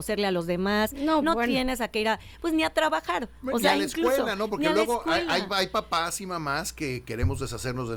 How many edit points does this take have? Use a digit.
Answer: 0